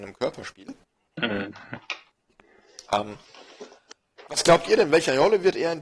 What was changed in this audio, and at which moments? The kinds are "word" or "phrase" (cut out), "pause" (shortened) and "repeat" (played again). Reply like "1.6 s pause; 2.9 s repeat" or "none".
none